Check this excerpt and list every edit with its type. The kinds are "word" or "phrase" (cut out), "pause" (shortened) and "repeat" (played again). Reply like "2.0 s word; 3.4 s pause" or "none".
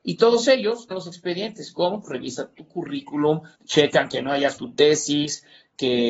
0.9 s word; 3.5 s pause; 4.6 s word